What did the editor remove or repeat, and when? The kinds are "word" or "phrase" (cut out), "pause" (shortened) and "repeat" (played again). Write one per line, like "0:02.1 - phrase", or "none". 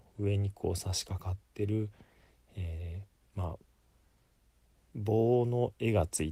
none